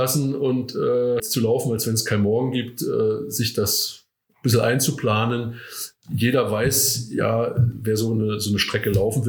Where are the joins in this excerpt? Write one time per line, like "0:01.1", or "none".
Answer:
0:01.2